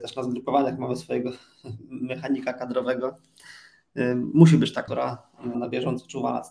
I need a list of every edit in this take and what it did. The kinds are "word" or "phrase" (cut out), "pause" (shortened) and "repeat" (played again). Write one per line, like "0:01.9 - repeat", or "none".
0:04.9 - word
0:05.5 - word